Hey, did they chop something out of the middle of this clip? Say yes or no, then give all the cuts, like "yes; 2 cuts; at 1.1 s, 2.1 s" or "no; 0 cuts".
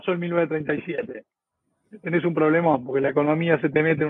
no; 0 cuts